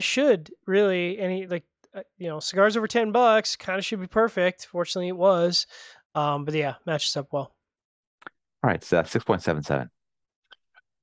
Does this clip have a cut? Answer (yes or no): no